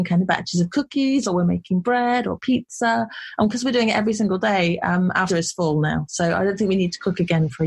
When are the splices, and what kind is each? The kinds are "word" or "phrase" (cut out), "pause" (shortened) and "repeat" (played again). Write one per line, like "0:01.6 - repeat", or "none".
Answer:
0:05.3 - word